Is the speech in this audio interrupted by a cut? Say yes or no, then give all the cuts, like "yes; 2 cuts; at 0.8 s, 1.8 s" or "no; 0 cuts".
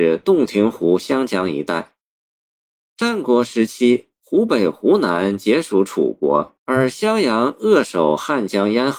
yes; 1 cut; at 6.6 s